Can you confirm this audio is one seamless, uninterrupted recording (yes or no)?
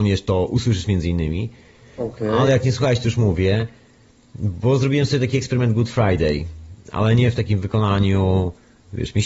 yes